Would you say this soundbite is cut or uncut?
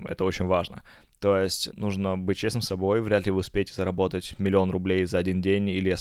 cut